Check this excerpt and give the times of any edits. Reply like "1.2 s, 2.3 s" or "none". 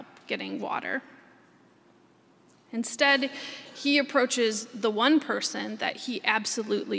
none